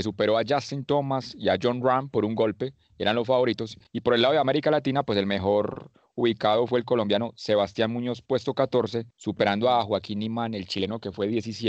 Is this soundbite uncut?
no; 2 cuts; at 3.9 s, 9.1 s

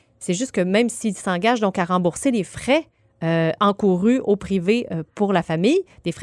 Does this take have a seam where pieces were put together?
no; 0 cuts

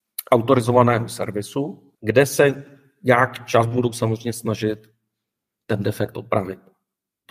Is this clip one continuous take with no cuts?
no; 1 cut; at 1.9 s

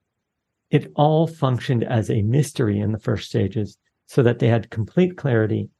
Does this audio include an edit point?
yes; 1 cut; at 3.9 s

